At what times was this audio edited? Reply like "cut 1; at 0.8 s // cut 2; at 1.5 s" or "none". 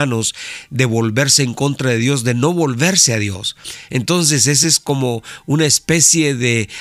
none